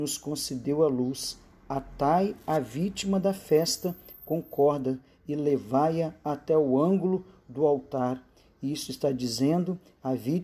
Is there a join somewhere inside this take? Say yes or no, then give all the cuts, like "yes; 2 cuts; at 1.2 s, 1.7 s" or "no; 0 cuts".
no; 0 cuts